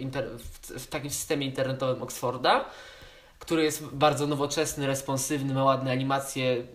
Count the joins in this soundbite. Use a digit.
0